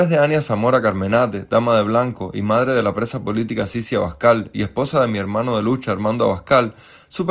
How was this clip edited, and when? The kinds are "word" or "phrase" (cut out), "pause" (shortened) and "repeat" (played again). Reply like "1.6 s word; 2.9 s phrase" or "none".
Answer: none